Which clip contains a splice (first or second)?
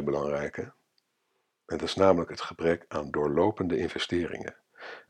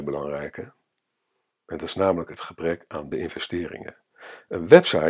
second